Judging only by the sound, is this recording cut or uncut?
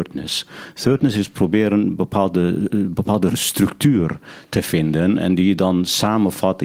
uncut